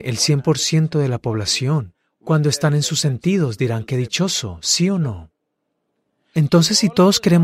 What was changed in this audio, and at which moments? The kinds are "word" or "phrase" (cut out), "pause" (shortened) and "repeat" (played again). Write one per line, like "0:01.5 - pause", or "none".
none